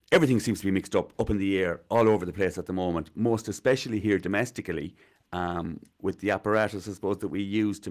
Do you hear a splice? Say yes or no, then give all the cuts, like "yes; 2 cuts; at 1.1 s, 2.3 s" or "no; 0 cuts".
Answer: no; 0 cuts